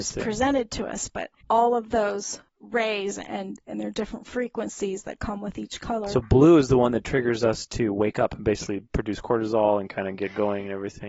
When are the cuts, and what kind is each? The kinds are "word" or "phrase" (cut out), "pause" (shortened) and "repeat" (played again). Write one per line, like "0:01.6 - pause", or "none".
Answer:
0:01.4 - pause
0:02.5 - pause